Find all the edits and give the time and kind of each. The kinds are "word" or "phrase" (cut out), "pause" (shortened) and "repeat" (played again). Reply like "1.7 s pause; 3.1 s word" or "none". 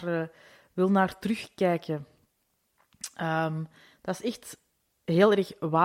none